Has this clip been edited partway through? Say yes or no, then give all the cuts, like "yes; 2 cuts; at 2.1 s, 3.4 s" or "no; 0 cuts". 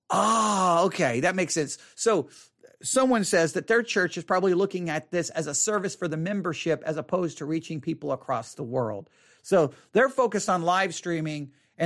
no; 0 cuts